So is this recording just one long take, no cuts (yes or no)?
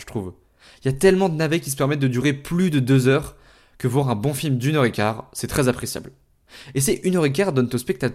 yes